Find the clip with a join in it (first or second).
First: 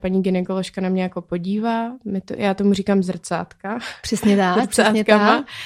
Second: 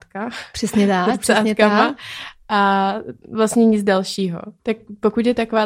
second